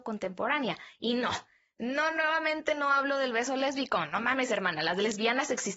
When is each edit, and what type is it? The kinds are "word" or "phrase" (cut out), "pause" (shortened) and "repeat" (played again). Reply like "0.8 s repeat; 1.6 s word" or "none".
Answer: none